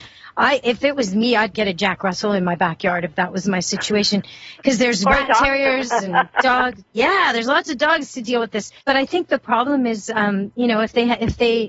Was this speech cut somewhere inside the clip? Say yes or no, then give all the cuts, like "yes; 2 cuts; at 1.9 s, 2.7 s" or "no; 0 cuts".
yes; 3 cuts; at 1.5 s, 6.9 s, 8.8 s